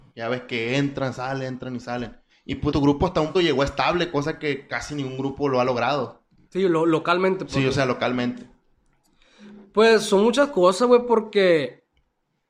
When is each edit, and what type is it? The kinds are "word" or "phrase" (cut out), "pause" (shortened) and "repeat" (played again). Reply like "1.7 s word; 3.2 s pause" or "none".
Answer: 2.3 s pause; 2.7 s phrase; 3.3 s word; 6.3 s pause